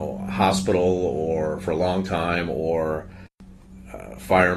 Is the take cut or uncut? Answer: uncut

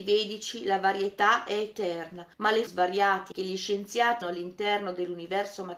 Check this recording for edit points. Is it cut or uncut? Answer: cut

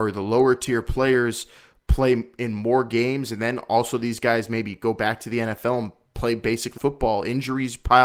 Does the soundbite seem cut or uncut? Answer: cut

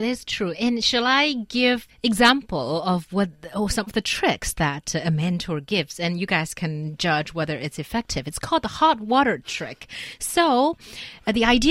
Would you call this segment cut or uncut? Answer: cut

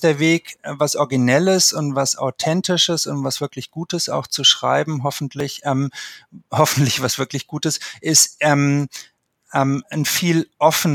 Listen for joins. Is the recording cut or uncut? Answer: uncut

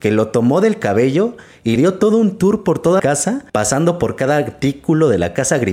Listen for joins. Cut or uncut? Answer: cut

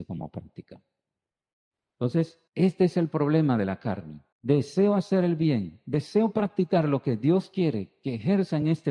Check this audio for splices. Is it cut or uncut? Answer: cut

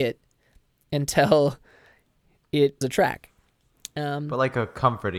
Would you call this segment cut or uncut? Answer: cut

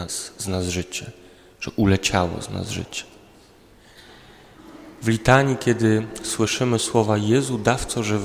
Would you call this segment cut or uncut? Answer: uncut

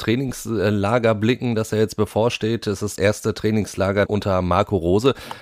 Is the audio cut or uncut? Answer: cut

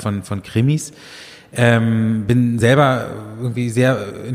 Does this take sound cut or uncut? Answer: uncut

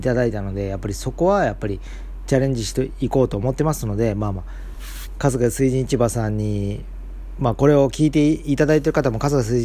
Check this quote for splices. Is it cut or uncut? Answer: uncut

